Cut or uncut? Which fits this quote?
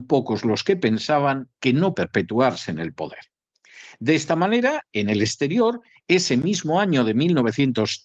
cut